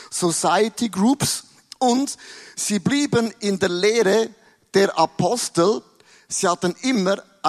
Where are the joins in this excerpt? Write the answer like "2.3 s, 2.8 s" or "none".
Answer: none